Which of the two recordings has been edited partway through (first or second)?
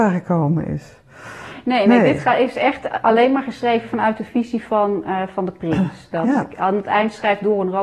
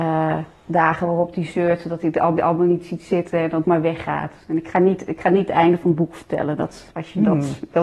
second